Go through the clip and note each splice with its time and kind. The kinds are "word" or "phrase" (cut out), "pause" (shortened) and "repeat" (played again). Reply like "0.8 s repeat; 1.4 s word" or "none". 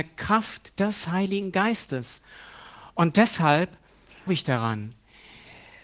4.3 s word